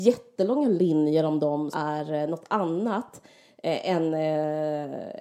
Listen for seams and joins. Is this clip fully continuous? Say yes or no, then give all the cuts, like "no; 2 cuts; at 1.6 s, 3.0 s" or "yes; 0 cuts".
no; 1 cut; at 1.7 s